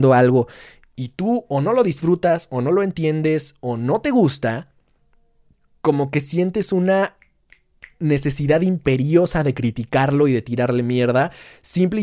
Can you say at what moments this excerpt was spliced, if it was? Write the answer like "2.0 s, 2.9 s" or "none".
none